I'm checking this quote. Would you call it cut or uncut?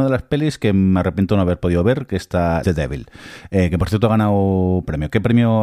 cut